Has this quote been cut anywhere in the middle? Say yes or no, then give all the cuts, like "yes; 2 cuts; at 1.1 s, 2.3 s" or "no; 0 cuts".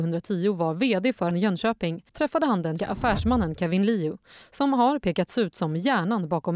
yes; 3 cuts; at 1.3 s, 2.1 s, 2.8 s